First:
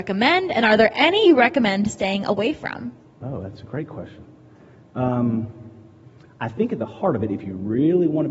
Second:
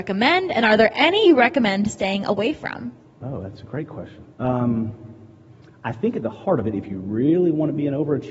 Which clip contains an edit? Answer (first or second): second